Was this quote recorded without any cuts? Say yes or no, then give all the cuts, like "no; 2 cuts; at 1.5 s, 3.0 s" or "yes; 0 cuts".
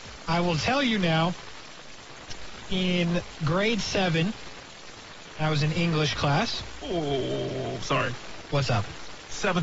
yes; 0 cuts